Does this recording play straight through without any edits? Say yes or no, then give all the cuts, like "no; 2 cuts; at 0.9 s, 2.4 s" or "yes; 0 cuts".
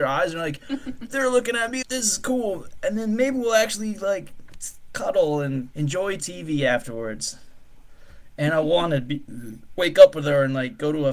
no; 3 cuts; at 1.8 s, 5.7 s, 6.2 s